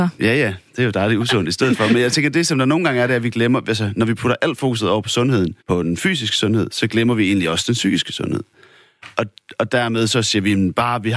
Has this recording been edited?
yes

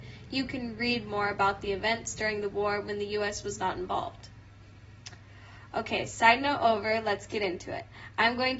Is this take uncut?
yes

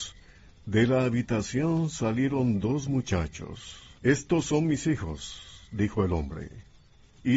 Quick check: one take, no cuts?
no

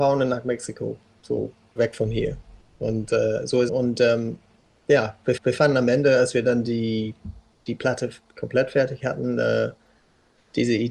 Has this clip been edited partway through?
yes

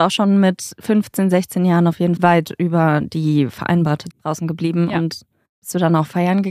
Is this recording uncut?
no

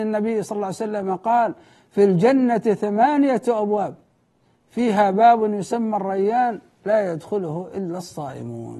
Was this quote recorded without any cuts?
yes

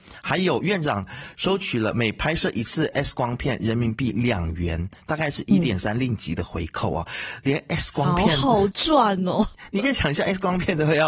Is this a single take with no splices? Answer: yes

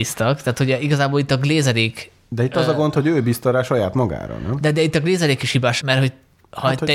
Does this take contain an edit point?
yes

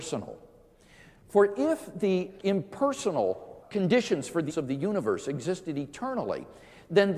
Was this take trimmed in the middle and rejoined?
yes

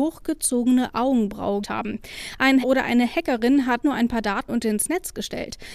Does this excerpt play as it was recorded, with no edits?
no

